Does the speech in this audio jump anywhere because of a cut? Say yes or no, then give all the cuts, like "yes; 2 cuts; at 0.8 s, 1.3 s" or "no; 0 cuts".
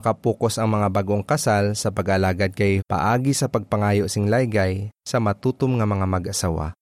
yes; 1 cut; at 2.8 s